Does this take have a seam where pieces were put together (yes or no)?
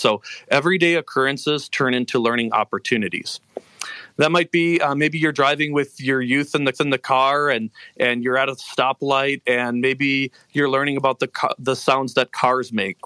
yes